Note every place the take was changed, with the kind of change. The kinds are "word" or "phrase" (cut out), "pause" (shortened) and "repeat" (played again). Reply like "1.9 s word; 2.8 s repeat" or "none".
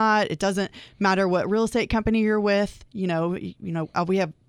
none